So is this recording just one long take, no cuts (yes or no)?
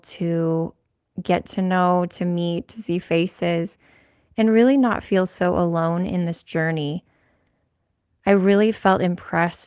yes